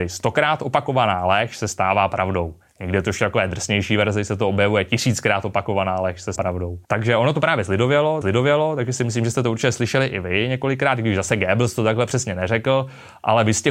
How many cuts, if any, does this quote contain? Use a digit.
3